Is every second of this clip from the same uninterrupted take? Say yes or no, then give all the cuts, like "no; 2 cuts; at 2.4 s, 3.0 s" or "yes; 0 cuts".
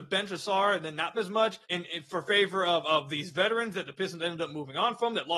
no; 2 cuts; at 1.1 s, 1.6 s